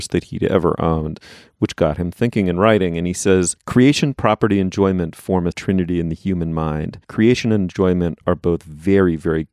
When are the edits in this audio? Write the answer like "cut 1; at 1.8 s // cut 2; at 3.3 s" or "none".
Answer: cut 1; at 5.5 s

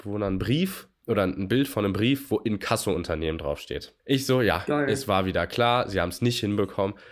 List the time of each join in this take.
cut 1; at 4.0 s

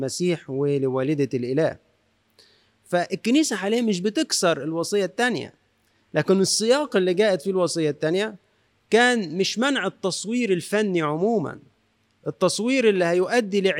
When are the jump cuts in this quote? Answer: none

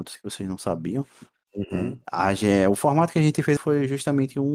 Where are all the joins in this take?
cut 1; at 3.6 s

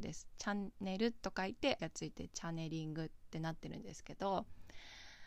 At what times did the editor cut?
cut 1; at 1.8 s

